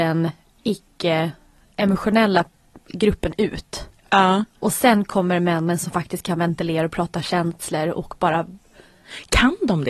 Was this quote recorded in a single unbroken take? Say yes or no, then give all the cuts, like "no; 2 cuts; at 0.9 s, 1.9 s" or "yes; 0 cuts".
yes; 0 cuts